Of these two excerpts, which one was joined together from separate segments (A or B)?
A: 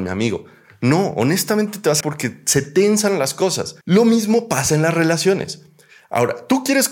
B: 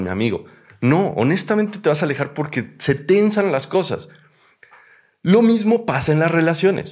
A